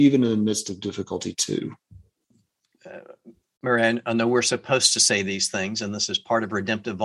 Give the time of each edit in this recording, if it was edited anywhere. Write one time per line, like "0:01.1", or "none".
none